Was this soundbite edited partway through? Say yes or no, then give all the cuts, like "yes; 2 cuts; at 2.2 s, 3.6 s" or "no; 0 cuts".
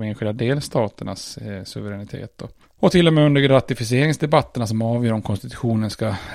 no; 0 cuts